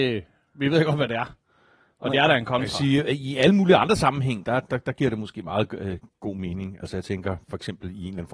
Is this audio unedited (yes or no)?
yes